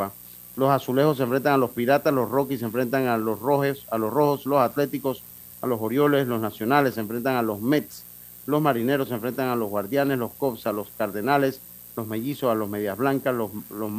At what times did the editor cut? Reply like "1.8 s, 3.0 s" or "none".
none